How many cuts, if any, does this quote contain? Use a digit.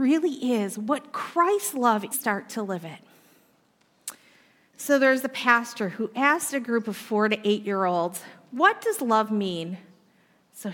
1